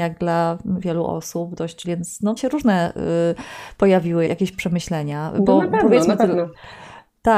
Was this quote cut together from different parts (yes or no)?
yes